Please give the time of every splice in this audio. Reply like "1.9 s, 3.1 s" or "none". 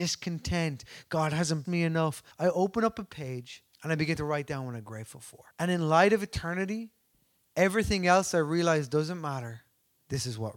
1.6 s, 2.3 s, 3.7 s, 5.5 s, 7.1 s